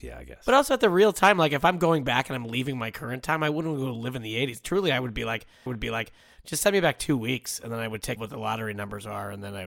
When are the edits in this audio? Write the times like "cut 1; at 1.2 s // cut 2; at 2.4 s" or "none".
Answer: cut 1; at 5.7 s // cut 2; at 8.2 s